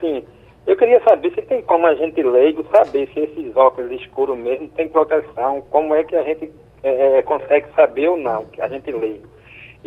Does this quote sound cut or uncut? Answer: uncut